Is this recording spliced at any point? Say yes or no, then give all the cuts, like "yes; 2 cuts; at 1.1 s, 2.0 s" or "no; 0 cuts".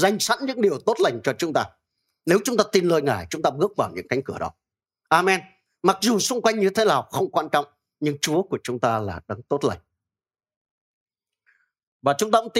no; 0 cuts